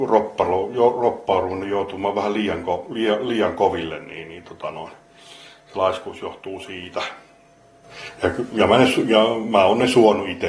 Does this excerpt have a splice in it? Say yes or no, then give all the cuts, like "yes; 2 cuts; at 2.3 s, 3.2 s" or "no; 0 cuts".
no; 0 cuts